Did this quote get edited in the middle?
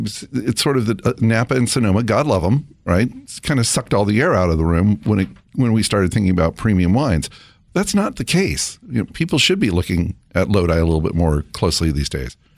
no; 0 cuts

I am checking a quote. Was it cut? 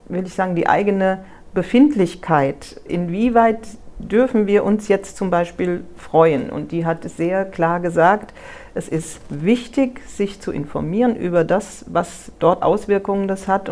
yes; 2 cuts; at 2.9 s, 12.6 s

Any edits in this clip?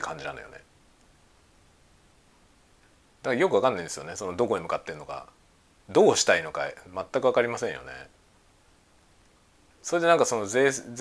no; 0 cuts

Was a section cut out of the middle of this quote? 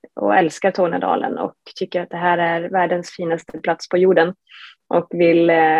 no; 0 cuts

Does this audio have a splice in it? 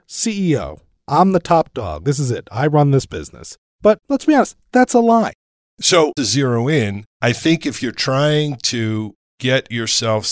yes; 3 cuts; at 4.0 s, 6.2 s, 7.1 s

